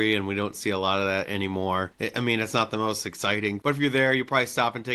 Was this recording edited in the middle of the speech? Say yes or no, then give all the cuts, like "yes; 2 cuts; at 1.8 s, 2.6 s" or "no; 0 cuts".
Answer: yes; 1 cut; at 3.6 s